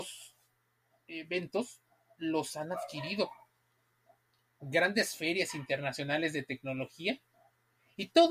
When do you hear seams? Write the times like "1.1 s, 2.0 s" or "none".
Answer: none